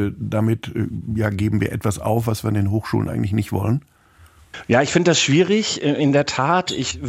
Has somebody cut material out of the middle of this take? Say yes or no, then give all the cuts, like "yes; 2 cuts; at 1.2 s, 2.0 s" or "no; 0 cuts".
no; 0 cuts